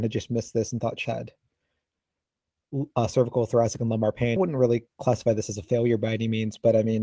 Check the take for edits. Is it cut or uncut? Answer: cut